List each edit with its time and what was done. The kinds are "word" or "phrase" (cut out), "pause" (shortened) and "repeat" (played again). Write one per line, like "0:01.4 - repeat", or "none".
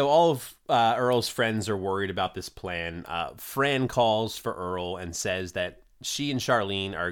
none